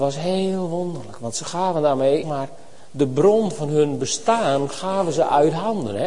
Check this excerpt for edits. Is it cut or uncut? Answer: cut